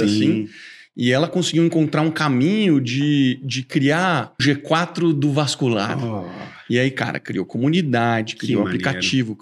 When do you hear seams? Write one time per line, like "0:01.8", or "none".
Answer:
0:04.4